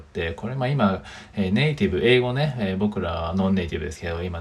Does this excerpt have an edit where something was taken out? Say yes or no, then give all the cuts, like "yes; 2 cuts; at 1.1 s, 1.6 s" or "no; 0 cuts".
no; 0 cuts